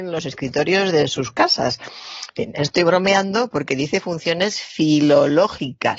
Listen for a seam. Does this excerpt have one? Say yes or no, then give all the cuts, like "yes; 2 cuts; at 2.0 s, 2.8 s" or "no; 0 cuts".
no; 0 cuts